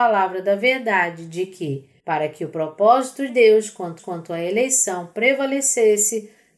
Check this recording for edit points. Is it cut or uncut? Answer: cut